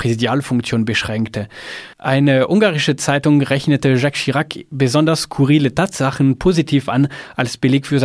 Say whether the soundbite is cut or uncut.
cut